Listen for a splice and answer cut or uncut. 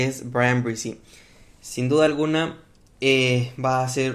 uncut